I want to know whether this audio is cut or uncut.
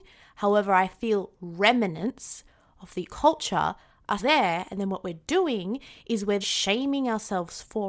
cut